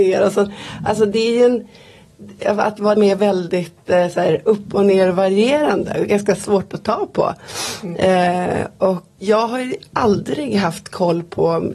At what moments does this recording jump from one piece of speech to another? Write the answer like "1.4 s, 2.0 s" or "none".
3.0 s, 9.2 s